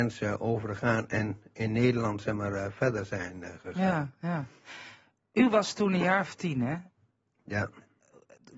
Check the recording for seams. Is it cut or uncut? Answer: uncut